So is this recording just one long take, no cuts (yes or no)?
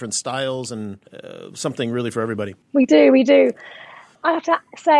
no